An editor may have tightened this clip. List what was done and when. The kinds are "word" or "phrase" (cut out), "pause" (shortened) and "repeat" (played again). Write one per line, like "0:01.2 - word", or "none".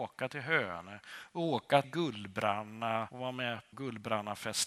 0:01.8 - word
0:03.1 - word
0:03.7 - word